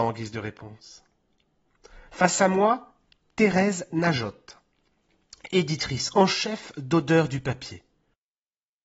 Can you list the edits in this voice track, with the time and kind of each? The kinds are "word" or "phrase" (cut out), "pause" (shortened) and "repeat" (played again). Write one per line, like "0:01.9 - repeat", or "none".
none